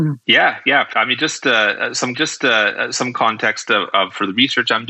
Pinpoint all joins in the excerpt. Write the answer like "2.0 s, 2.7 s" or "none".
0.9 s, 2.1 s